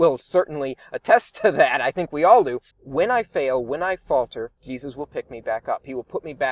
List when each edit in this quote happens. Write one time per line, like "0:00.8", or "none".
0:02.7
0:04.6